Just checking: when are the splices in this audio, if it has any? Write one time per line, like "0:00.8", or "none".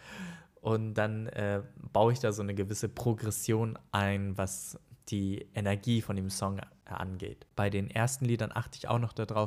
none